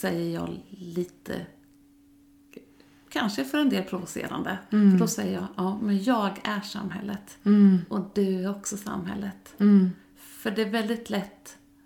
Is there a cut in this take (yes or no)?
no